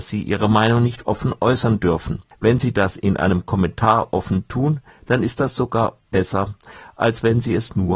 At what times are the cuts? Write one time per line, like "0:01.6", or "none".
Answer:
0:02.3